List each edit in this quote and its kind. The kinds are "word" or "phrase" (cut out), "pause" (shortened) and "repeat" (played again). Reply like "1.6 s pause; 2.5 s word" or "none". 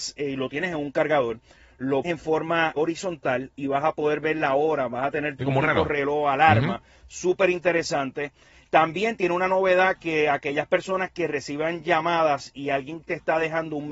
2.0 s word; 2.8 s word; 5.4 s word